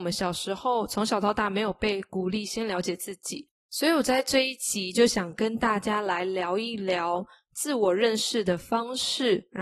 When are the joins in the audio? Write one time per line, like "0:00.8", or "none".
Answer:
0:03.6